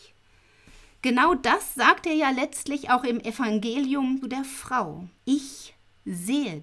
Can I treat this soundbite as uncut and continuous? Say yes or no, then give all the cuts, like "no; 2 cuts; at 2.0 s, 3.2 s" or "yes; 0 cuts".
no; 2 cuts; at 4.2 s, 5.2 s